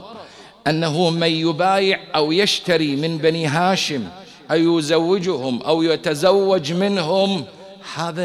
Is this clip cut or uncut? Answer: uncut